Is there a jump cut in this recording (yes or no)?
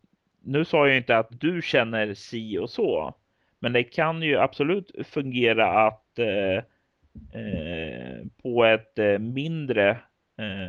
yes